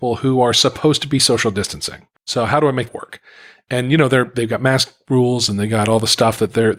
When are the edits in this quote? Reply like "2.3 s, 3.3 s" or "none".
2.2 s, 2.9 s